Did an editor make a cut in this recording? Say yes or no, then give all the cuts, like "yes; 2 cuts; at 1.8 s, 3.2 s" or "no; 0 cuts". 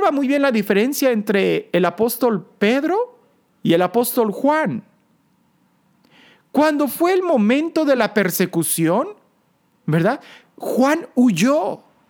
no; 0 cuts